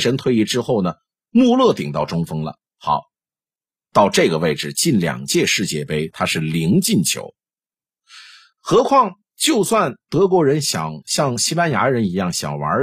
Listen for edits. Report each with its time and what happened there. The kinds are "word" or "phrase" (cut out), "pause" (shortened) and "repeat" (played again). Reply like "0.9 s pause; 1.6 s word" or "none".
none